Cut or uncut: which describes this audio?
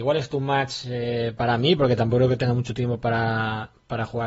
uncut